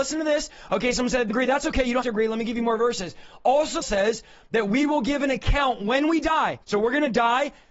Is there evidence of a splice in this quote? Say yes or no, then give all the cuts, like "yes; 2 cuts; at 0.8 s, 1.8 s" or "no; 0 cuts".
yes; 4 cuts; at 1.3 s, 2.0 s, 3.8 s, 6.6 s